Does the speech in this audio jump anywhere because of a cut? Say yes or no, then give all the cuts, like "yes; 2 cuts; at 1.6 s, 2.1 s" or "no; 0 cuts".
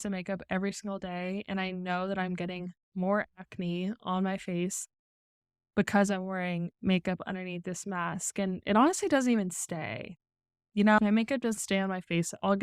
yes; 2 cuts; at 11.0 s, 11.6 s